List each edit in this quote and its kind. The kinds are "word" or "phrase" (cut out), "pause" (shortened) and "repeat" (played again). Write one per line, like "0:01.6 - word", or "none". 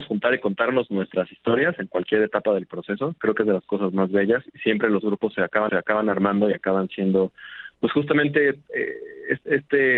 0:05.7 - repeat